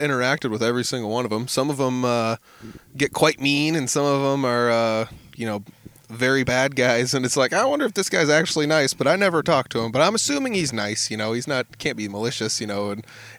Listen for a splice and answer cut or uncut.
cut